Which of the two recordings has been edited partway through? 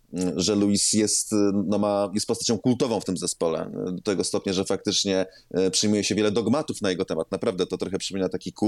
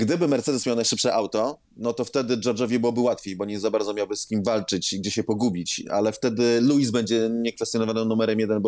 second; 1 cut; at 1.6 s

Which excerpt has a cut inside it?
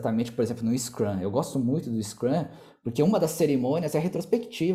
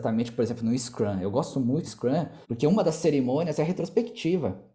second; 2 cuts; at 1.8 s, 2.4 s

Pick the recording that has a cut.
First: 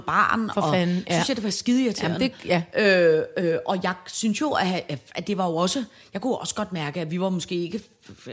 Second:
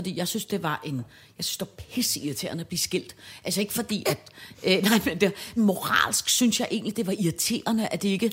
second; 1 cut; at 5.6 s

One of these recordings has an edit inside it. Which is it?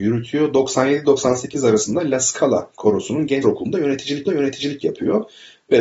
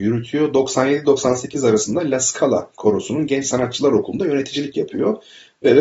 first; 2 cuts; at 3.4 s, 4.3 s

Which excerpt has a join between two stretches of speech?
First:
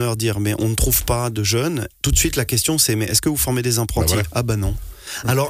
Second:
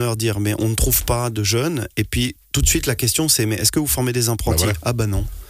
first; 1 cut; at 1.9 s

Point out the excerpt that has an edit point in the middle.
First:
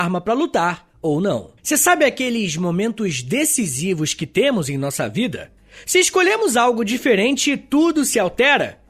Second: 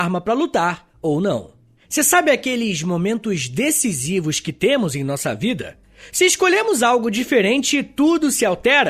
first; 1 cut; at 1.6 s

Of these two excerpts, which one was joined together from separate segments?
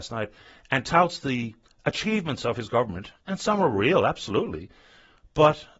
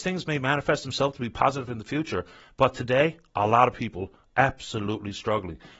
first; 1 cut; at 1.6 s

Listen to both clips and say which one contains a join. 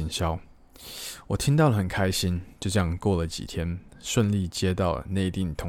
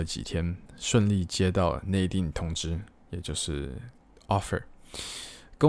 first; 1 cut; at 2.5 s

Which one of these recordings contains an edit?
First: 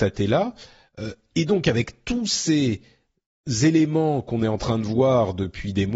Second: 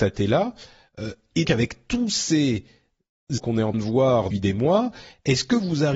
second; 4 cuts; at 1.4 s, 3.4 s, 3.7 s, 4.3 s

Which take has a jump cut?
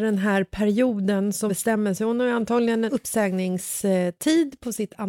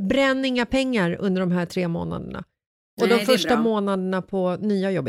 first; 2 cuts; at 1.5 s, 2.9 s

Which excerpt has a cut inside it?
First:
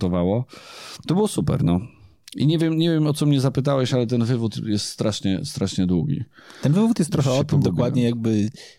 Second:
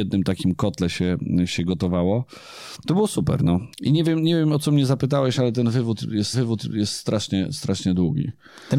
second; 2 cuts; at 3.7 s, 6.3 s

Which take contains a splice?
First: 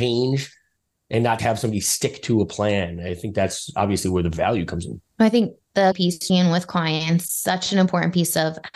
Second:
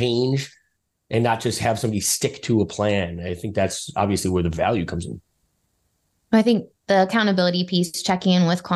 first; 5 cuts; at 1.4 s, 5.1 s, 5.9 s, 6.3 s, 7.3 s

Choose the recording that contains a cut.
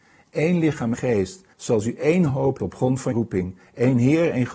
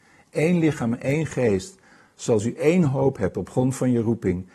first; 4 cuts; at 0.9 s, 1.5 s, 2.6 s, 3.1 s

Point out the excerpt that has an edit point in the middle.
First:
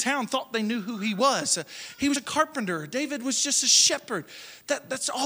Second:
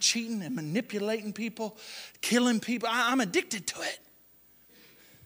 first; 1 cut; at 2.2 s

